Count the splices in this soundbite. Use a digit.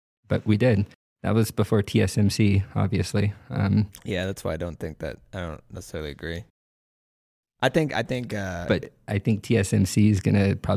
0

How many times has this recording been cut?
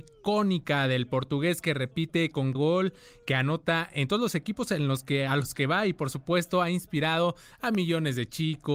1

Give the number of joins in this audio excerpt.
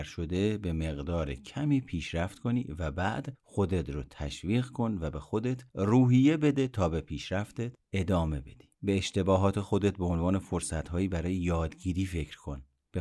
1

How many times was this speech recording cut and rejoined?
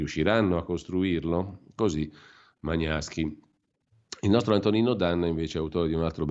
0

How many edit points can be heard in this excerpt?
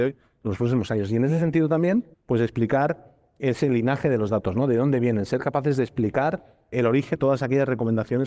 3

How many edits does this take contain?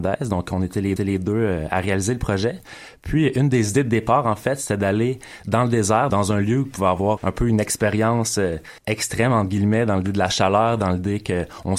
4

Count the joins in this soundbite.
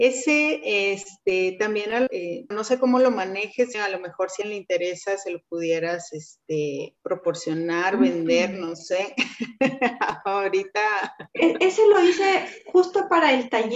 5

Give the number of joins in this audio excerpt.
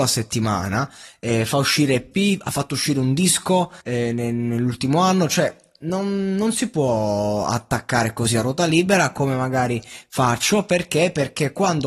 1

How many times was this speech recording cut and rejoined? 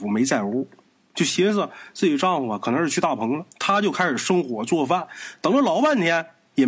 1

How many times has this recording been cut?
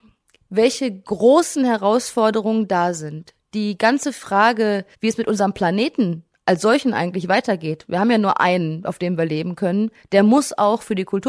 1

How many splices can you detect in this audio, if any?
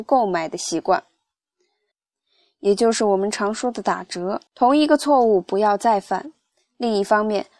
2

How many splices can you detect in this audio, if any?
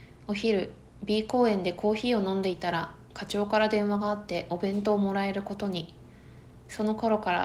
0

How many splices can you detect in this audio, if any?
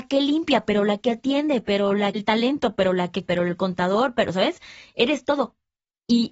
2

